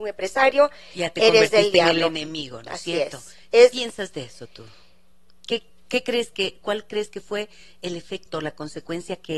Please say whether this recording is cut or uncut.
uncut